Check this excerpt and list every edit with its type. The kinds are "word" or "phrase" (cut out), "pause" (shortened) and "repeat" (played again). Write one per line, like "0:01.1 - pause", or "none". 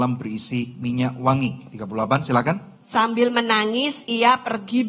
0:02.8 - pause